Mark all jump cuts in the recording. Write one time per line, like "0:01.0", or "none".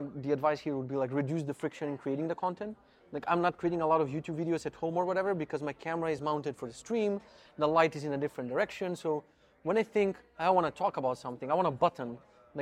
none